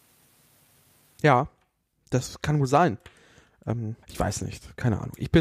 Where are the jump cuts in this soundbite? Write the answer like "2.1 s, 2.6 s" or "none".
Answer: 4.0 s

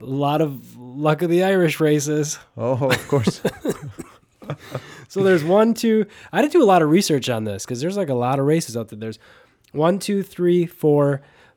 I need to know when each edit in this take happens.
none

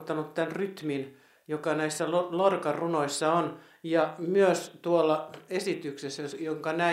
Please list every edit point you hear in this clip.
none

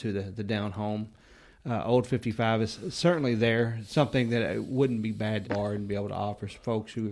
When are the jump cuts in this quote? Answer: 5.4 s

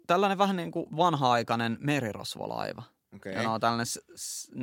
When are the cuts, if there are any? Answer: none

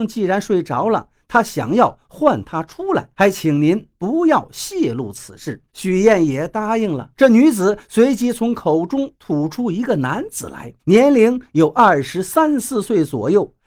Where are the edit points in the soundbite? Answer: 3.1 s, 5.7 s, 7.1 s, 10.8 s

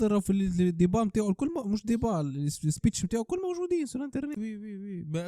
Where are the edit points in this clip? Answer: 4.4 s

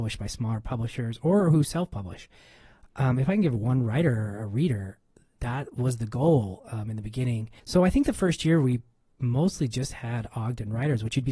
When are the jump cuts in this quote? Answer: 7.6 s

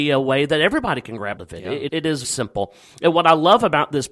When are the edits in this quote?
1.4 s, 1.9 s, 2.2 s

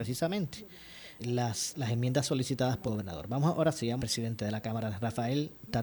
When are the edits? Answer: 1.2 s, 2.9 s, 4.0 s

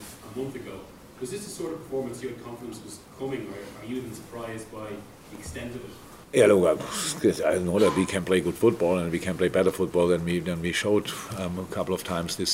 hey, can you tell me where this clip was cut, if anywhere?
3.1 s, 6.2 s

